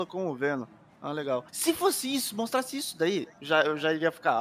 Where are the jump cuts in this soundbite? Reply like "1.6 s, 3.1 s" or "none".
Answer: 1.5 s